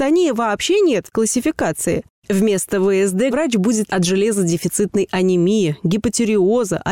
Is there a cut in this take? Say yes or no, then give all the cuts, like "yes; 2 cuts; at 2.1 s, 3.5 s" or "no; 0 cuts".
yes; 3 cuts; at 1.1 s, 3.3 s, 3.9 s